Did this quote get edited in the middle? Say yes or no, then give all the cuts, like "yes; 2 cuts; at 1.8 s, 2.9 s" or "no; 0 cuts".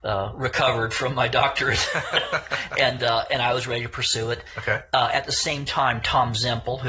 no; 0 cuts